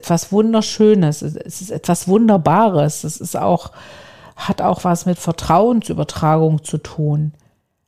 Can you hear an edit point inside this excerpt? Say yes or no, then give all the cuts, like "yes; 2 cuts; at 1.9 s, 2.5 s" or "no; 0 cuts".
no; 0 cuts